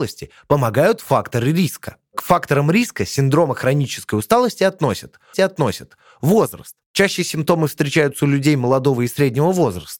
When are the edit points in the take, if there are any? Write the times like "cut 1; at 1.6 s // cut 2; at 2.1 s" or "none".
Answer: cut 1; at 5.3 s